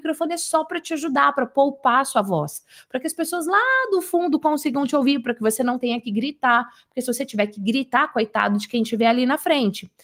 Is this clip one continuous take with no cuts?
yes; 0 cuts

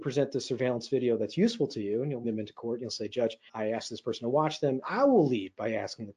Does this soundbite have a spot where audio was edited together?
yes; 3 cuts; at 2.2 s, 3.5 s, 4.8 s

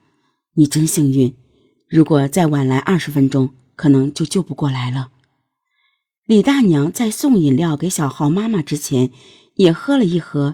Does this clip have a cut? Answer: no; 0 cuts

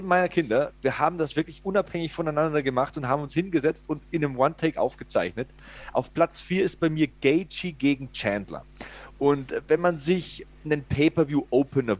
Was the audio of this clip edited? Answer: no; 0 cuts

